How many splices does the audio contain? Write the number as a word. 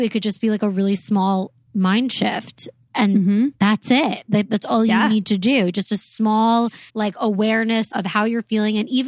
three